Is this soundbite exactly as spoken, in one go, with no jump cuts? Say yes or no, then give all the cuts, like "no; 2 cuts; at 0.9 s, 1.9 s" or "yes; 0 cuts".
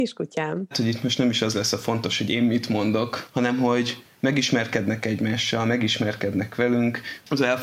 yes; 0 cuts